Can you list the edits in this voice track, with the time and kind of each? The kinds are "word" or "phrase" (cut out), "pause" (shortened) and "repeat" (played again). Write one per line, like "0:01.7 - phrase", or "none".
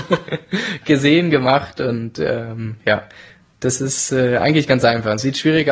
none